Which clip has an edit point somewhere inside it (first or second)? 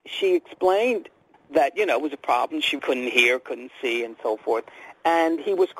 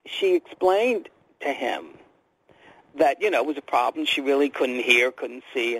first